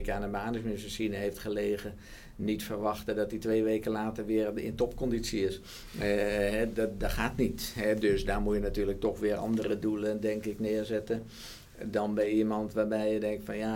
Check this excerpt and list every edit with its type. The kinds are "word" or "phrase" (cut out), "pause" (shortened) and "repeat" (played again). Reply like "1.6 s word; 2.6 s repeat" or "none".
7.0 s word